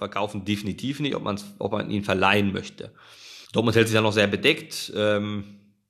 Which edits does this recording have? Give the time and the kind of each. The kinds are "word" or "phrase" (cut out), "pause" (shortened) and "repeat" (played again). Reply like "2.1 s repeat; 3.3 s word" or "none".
3.4 s pause